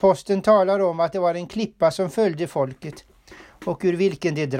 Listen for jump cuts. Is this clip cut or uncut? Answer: uncut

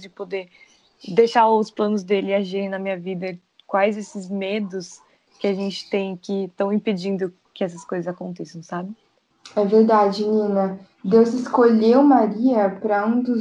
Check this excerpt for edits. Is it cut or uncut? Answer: uncut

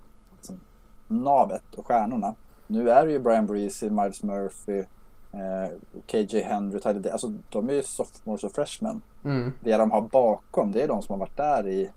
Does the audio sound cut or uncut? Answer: cut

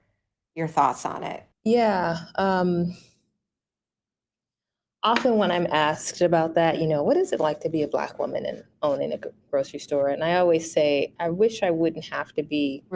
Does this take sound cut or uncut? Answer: cut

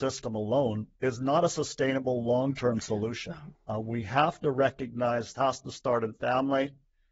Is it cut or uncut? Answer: cut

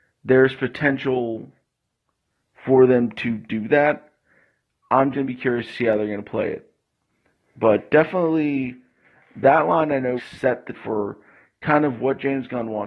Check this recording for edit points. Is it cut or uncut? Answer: cut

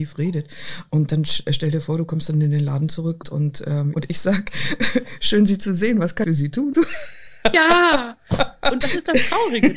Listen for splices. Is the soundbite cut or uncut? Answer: cut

